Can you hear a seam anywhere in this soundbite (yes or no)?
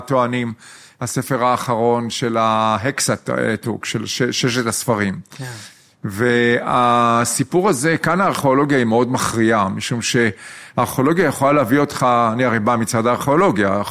no